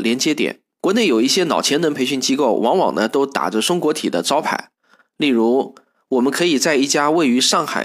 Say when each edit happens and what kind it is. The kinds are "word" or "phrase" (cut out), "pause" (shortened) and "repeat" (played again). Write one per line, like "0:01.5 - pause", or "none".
none